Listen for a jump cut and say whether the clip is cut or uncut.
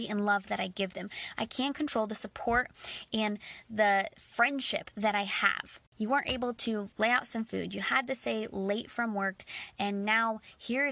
cut